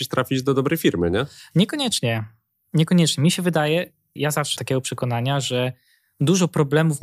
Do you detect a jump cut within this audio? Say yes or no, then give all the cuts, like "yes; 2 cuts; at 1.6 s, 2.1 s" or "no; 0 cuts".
yes; 2 cuts; at 4.2 s, 4.6 s